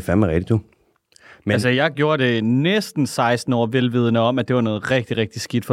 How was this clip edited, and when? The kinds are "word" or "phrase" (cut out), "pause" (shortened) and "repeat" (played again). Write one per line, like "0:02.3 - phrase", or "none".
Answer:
none